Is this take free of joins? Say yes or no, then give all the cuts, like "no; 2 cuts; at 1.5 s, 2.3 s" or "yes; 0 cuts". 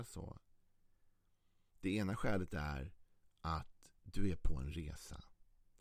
yes; 0 cuts